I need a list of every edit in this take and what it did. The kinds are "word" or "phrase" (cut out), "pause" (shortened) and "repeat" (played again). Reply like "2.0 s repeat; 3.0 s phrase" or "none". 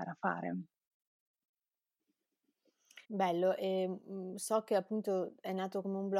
3.0 s pause